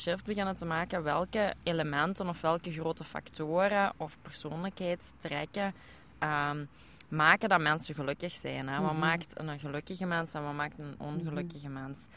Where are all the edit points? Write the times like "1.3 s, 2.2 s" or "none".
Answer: none

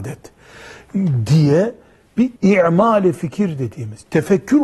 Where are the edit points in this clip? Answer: 2.4 s

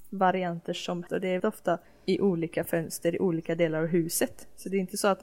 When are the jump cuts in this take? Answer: 1.1 s, 1.4 s, 1.8 s

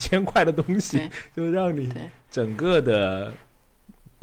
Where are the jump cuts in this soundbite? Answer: none

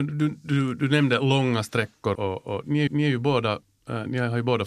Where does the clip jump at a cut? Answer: 2.1 s, 2.9 s

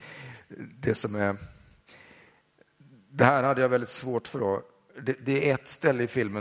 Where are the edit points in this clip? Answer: none

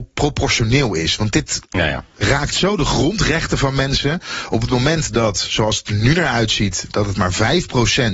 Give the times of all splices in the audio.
1.6 s

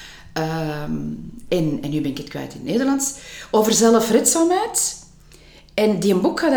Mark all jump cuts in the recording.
none

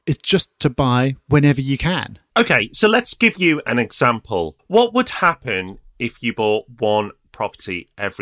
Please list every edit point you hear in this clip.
4.6 s

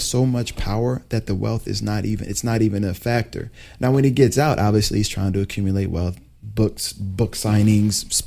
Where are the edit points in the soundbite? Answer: none

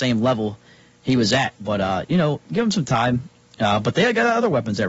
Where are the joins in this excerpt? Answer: 1.6 s

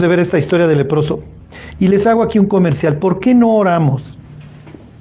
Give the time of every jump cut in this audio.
none

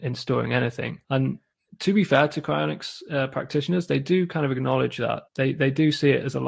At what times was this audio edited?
1.0 s, 5.3 s

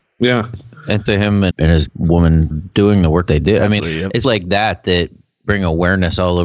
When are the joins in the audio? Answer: 1.1 s, 1.5 s, 1.9 s, 2.5 s, 3.3 s, 3.8 s, 4.2 s

